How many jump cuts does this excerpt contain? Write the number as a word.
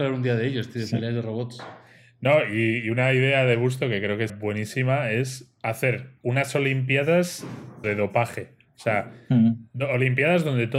two